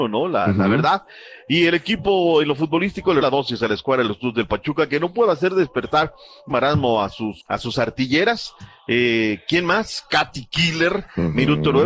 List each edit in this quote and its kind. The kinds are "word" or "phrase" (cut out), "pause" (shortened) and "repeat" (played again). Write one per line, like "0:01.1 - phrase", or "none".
0:03.2 - word
0:06.5 - word
0:07.4 - word